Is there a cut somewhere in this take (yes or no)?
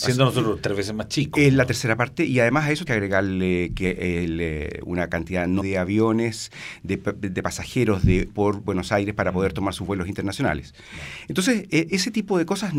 yes